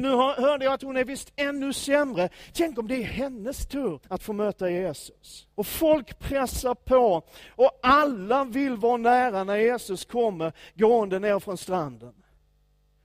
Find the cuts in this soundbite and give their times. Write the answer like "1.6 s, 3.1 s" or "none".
4.0 s, 5.5 s